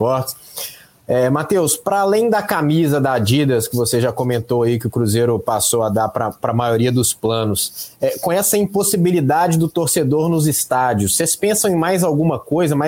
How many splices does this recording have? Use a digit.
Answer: 0